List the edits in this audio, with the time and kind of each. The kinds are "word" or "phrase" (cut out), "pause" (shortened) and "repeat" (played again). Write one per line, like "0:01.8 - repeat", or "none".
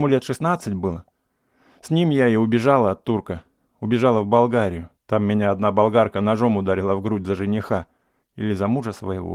0:05.0 - pause